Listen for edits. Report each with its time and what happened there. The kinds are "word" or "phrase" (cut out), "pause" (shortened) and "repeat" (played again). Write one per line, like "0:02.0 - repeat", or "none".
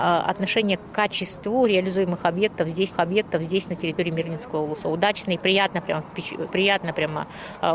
0:02.9 - repeat
0:06.5 - word